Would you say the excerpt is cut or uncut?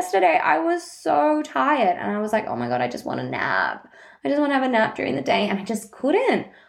uncut